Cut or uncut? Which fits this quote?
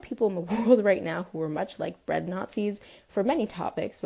uncut